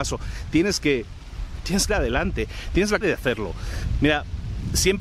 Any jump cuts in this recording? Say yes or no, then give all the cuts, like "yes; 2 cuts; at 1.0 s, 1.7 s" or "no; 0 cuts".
yes; 2 cuts; at 1.9 s, 3.0 s